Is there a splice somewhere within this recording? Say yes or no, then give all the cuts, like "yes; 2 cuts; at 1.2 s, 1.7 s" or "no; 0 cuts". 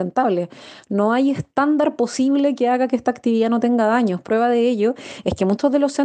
no; 0 cuts